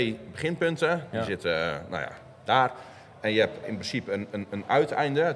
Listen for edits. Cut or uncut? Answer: cut